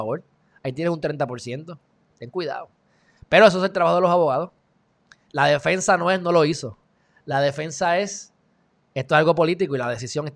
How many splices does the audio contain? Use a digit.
0